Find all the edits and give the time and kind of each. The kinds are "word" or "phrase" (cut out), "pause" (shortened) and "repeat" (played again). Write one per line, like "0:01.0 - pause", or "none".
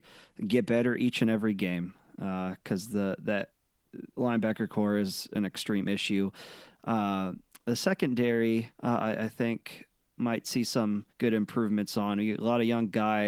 0:04.1 - pause
0:08.7 - pause
0:11.1 - pause